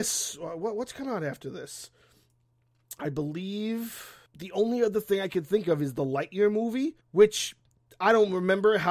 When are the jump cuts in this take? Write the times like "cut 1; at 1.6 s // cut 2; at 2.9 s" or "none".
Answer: cut 1; at 7.0 s